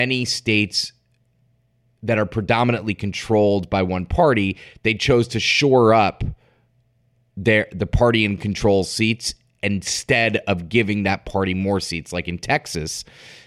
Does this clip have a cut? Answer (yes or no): no